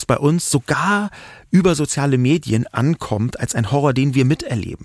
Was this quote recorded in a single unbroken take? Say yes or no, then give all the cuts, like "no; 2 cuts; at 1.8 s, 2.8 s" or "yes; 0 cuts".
yes; 0 cuts